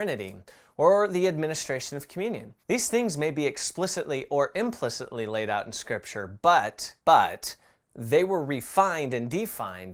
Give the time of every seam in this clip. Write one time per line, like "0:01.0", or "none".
0:02.6
0:07.0

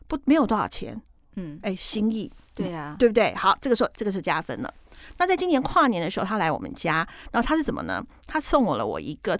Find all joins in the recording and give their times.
0:02.5
0:03.9

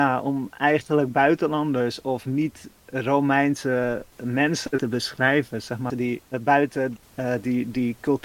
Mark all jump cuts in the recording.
0:04.1
0:05.9
0:06.3

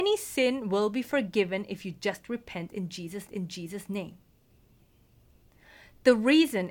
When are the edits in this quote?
0:03.3

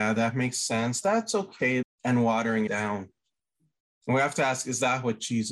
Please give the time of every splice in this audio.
0:01.8
0:02.7

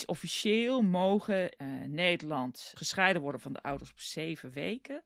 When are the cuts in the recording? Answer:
0:01.6
0:02.8

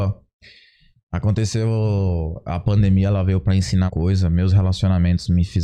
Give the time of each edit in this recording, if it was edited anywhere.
0:03.9

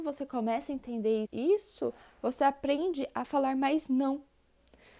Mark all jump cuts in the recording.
0:01.2

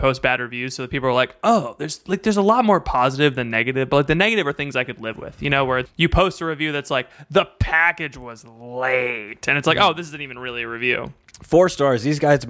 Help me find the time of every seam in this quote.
0:05.9

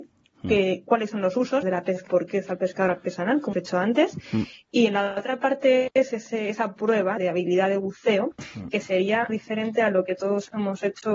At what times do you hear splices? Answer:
0:01.6
0:02.1
0:03.5
0:07.2
0:09.3

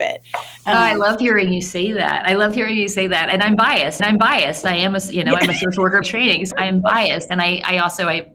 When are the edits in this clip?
0:04.0
0:06.0
0:06.5

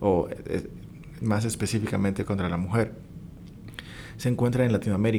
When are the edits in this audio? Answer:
0:01.2
0:02.3

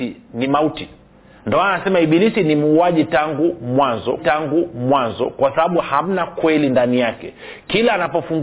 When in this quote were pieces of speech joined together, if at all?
0:01.1
0:04.2

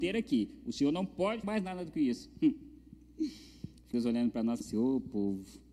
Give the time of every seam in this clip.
0:01.4
0:03.9
0:04.6

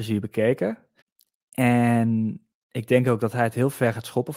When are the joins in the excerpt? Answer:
0:01.0

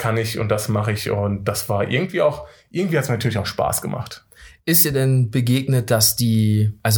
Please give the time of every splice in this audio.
none

